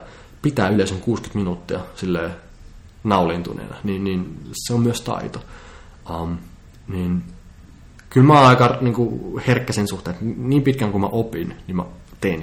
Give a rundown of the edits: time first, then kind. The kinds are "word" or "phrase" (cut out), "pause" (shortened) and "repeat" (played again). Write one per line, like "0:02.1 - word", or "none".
none